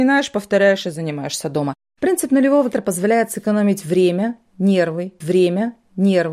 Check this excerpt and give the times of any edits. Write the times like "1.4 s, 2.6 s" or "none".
2.7 s, 5.2 s